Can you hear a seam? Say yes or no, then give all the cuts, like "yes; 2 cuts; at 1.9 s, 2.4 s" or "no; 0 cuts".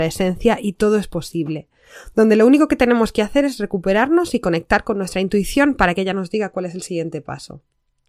no; 0 cuts